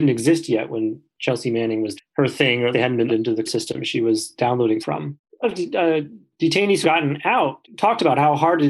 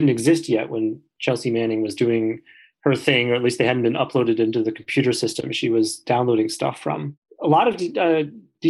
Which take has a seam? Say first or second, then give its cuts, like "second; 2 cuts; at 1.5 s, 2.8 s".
first; 7 cuts; at 2.0 s, 2.7 s, 3.1 s, 3.5 s, 4.8 s, 5.4 s, 6.8 s